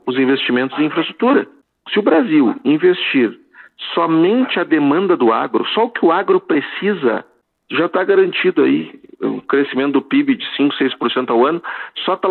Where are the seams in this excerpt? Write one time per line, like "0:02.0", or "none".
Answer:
none